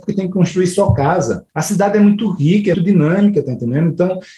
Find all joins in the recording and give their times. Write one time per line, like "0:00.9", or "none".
0:01.5
0:02.7